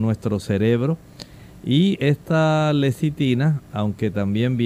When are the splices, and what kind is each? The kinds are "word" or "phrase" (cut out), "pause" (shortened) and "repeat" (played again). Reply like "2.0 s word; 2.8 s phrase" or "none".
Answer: none